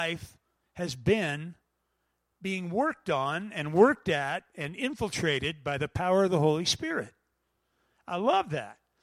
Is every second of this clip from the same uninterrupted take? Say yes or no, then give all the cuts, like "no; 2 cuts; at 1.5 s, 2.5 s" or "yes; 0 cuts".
yes; 0 cuts